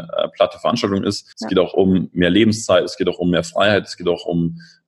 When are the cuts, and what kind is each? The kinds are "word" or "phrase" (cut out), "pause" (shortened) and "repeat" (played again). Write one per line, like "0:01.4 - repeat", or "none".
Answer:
0:01.3 - pause